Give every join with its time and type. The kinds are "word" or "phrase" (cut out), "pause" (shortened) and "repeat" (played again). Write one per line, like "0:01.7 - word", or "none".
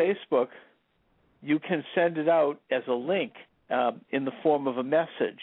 0:03.5 - pause

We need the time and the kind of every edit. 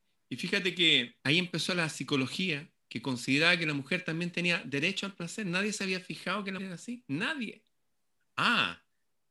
0:01.2 - pause
0:06.6 - word

